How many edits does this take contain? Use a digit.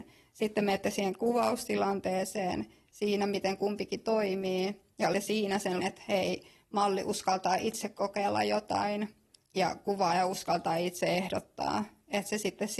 2